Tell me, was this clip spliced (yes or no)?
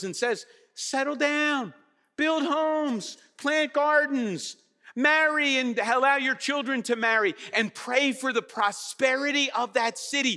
no